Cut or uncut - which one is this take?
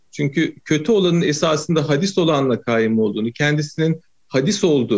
uncut